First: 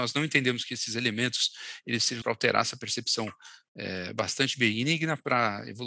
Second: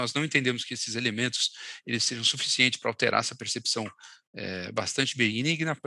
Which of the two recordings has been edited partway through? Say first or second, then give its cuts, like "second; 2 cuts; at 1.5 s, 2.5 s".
first; 1 cut; at 2.2 s